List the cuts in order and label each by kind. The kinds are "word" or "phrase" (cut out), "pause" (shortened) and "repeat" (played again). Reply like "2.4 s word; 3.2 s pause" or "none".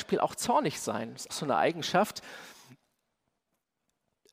1.3 s word